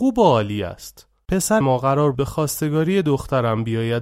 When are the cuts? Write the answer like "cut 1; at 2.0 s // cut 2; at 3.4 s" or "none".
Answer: cut 1; at 1.6 s // cut 2; at 2.1 s

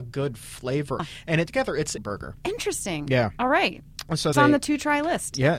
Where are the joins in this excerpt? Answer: cut 1; at 1.0 s // cut 2; at 1.5 s // cut 3; at 2.0 s // cut 4; at 4.3 s

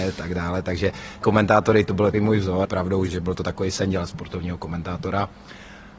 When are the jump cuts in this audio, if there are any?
cut 1; at 1.2 s // cut 2; at 2.1 s // cut 3; at 2.6 s // cut 4; at 3.1 s

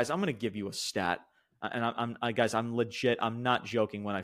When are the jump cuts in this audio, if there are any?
none

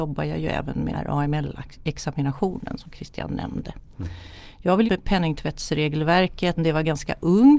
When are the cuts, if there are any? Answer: cut 1; at 0.9 s // cut 2; at 4.9 s // cut 3; at 6.6 s

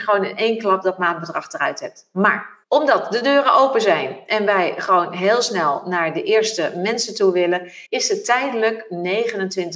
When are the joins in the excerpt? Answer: cut 1; at 2.6 s // cut 2; at 7.9 s

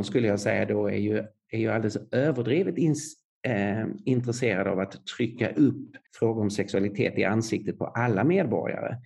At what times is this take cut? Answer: cut 1; at 6.1 s

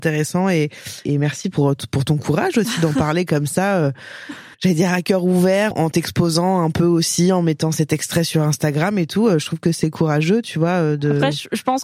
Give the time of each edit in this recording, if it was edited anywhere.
cut 1; at 1.0 s // cut 2; at 1.5 s // cut 3; at 4.5 s // cut 4; at 5.7 s

